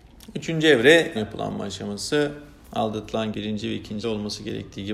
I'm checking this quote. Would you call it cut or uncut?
cut